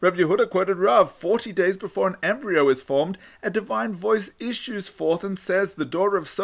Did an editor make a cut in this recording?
no; 0 cuts

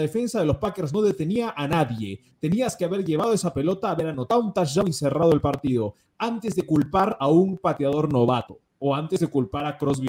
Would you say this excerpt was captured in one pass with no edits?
yes; 0 cuts

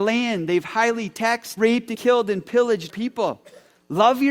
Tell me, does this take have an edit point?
yes; 3 cuts; at 1.6 s, 1.9 s, 2.9 s

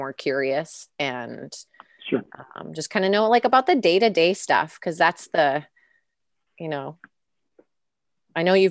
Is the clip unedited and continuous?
yes; 0 cuts

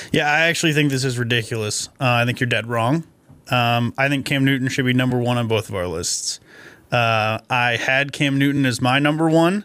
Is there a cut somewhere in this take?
no; 0 cuts

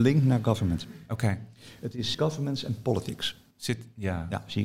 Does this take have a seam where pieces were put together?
yes; 2 cuts; at 2.1 s, 3.5 s

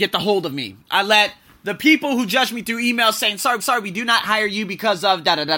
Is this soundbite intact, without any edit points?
no; 1 cut; at 3.6 s

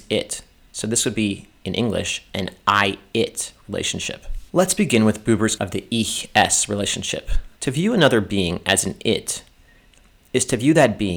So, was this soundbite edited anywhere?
yes; 3 cuts; at 4.5 s, 5.6 s, 7.6 s

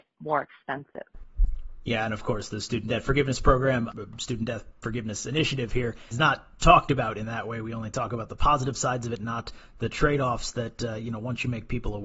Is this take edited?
no; 0 cuts

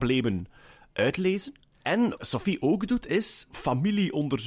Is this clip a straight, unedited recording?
no; 2 cuts; at 2.2 s, 3.5 s

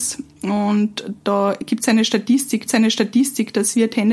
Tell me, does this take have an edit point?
yes; 1 cut; at 2.7 s

